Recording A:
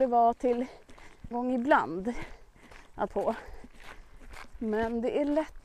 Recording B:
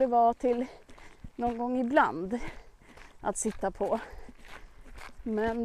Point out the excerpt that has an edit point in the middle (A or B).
A